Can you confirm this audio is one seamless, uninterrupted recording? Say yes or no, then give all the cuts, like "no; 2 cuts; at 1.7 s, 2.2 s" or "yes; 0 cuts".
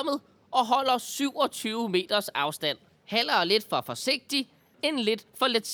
no; 1 cut; at 2.9 s